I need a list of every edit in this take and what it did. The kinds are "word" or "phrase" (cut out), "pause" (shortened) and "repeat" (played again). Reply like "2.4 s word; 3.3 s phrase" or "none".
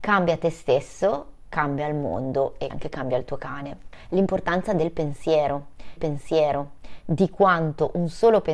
2.7 s word; 6.0 s repeat